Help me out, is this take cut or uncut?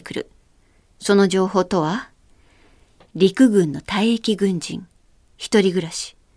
uncut